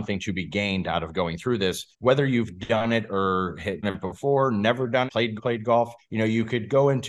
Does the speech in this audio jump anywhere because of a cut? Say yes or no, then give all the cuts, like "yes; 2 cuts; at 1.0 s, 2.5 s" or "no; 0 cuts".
yes; 5 cuts; at 1.9 s, 3.8 s, 5.1 s, 5.4 s, 6.0 s